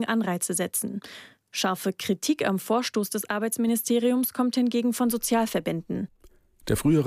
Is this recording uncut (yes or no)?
yes